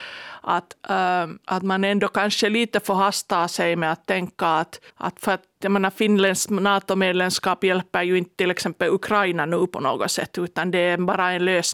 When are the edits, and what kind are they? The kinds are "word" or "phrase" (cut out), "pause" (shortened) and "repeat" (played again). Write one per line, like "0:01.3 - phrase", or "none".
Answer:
0:01.4 - pause
0:04.9 - pause